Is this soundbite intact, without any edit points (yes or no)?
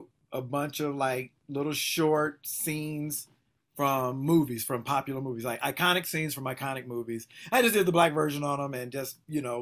yes